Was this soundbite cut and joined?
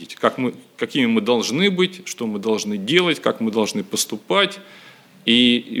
no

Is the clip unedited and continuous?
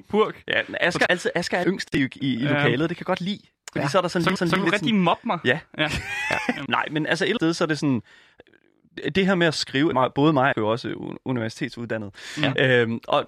no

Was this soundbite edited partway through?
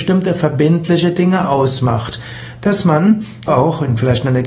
yes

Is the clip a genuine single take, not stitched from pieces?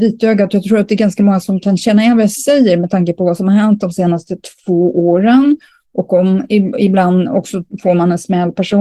yes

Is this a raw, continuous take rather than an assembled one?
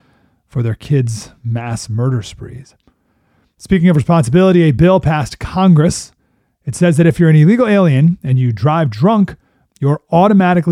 yes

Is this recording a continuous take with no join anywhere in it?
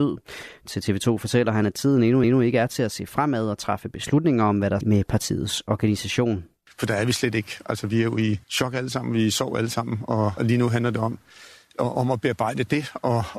no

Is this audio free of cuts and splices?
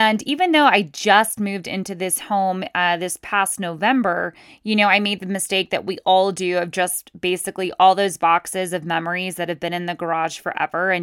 yes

